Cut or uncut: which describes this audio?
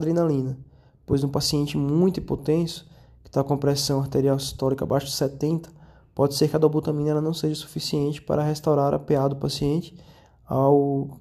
uncut